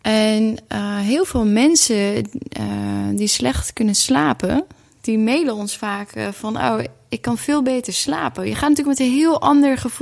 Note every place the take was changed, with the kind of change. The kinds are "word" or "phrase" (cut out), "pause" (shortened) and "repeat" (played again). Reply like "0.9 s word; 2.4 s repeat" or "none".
none